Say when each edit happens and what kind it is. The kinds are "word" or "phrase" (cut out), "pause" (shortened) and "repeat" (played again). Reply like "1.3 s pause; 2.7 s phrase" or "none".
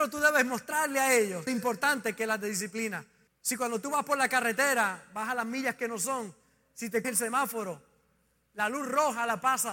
1.5 s phrase; 3.3 s pause; 7.0 s word